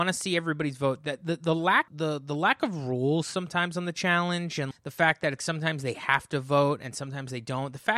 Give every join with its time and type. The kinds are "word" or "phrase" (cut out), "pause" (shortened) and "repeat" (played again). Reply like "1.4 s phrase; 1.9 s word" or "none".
1.9 s word; 4.7 s word; 5.4 s word